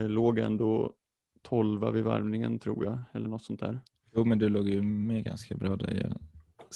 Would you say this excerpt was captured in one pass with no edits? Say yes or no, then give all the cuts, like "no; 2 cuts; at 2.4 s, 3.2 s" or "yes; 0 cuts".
yes; 0 cuts